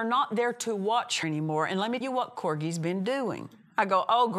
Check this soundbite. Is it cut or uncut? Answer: cut